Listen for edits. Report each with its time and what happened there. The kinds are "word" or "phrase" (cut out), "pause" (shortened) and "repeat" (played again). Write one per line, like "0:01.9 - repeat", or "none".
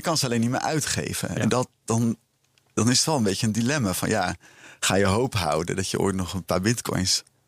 none